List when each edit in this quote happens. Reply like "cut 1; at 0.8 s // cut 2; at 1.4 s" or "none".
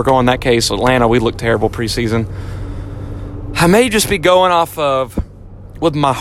none